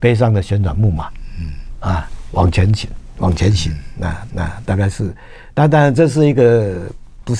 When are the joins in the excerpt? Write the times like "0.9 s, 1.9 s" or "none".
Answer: 4.3 s

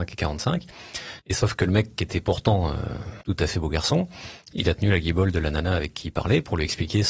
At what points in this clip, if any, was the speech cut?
1.2 s, 3.2 s

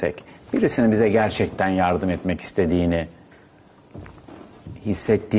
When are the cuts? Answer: none

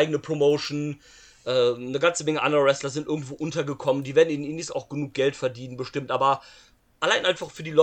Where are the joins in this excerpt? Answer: none

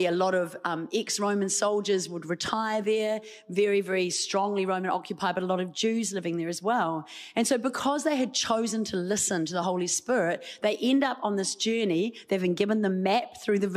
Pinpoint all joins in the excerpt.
none

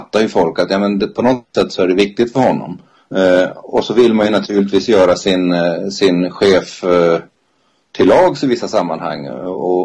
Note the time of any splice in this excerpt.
none

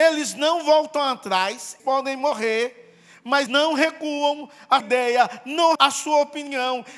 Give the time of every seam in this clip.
1.8 s, 3.5 s, 4.8 s, 5.7 s

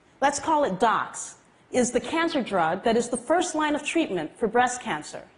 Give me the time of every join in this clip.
none

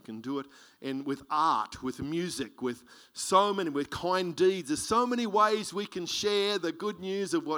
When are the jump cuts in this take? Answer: none

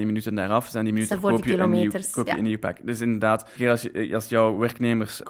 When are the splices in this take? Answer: 1.1 s, 3.6 s

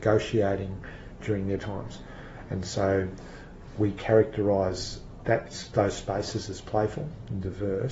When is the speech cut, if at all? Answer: 1.6 s

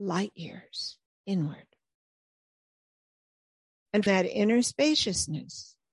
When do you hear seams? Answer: 1.1 s, 4.1 s

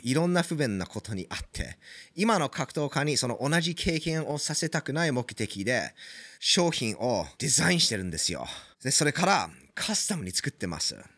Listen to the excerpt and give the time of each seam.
6.3 s, 7.3 s, 8.7 s

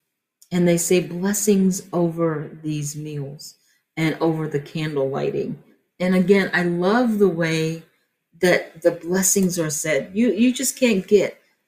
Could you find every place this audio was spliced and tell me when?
none

